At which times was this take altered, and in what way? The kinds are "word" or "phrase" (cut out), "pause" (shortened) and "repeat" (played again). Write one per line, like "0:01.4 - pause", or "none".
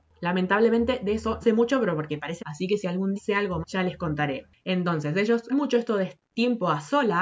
0:01.4 - word
0:02.4 - word
0:03.1 - word
0:03.6 - word
0:05.5 - word
0:06.3 - word